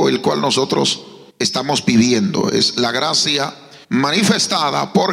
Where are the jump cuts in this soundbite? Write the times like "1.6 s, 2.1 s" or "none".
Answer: 1.3 s, 3.8 s